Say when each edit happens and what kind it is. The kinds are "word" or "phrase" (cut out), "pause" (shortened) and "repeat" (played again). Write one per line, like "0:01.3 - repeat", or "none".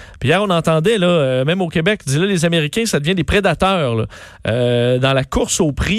none